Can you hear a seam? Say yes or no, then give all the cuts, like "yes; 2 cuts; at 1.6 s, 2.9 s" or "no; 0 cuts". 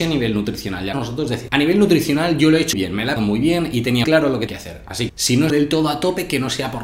yes; 8 cuts; at 0.9 s, 1.5 s, 2.7 s, 3.2 s, 4.0 s, 4.5 s, 5.1 s, 5.5 s